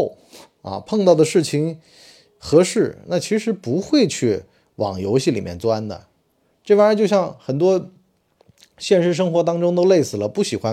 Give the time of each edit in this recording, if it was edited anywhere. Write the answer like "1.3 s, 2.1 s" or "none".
none